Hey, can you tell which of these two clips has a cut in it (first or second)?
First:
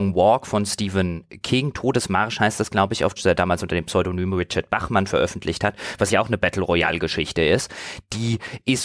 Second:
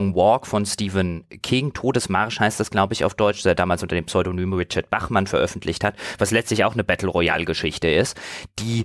first